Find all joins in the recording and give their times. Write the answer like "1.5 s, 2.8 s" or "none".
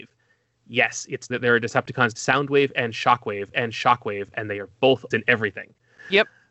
1.3 s, 2.1 s, 3.5 s, 5.1 s

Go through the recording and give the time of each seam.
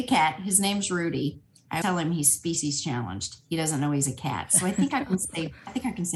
1.8 s

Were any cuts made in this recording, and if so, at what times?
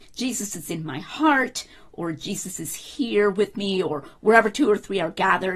none

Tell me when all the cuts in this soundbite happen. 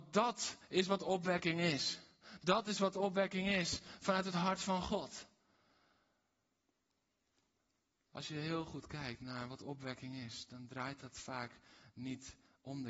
none

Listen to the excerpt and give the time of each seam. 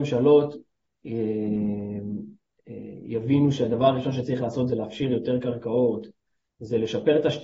none

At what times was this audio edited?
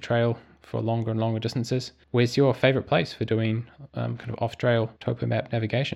2.0 s, 3.9 s, 5.0 s

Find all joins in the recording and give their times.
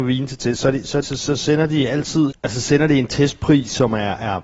1.0 s, 2.3 s

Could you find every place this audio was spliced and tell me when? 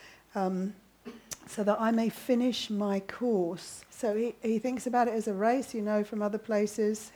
3.9 s

